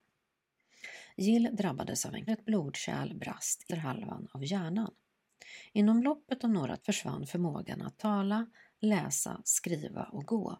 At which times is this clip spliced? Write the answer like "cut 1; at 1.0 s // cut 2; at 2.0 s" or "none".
cut 1; at 2.3 s // cut 2; at 3.7 s // cut 3; at 6.8 s